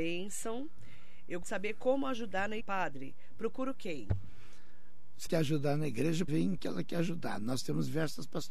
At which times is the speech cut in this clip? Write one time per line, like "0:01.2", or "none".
0:01.4
0:02.6
0:05.3
0:06.3
0:06.6